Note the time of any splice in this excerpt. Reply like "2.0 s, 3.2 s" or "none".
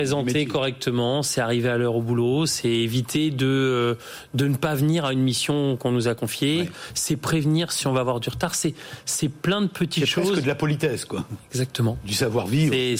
none

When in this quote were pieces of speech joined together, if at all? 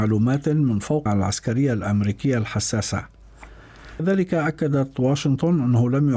1.1 s, 4.0 s

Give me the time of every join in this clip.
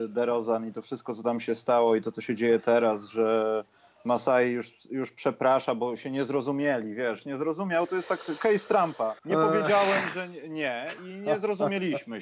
9.2 s

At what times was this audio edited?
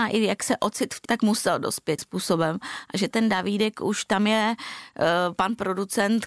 1.0 s, 2.0 s, 3.1 s

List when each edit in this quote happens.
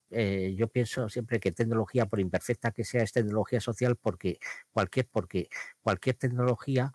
1.5 s, 5.1 s

